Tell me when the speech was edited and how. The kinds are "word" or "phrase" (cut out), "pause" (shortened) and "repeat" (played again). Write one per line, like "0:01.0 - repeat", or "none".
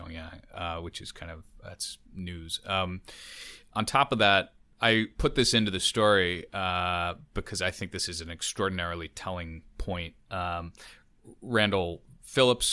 none